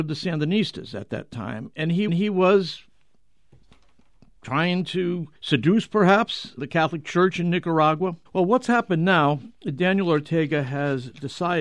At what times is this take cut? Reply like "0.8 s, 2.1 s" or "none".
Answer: 2.1 s, 5.3 s, 6.6 s, 8.3 s

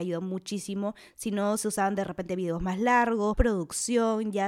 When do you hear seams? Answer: 3.3 s

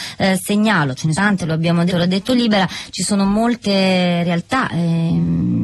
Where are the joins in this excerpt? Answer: 1.1 s, 1.9 s

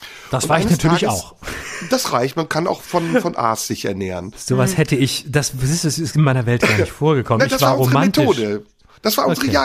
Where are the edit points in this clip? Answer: none

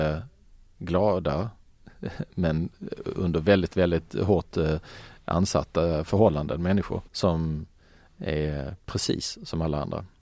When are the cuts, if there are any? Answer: 7.1 s, 8.8 s

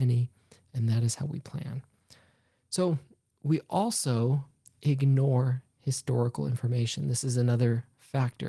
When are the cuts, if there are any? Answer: none

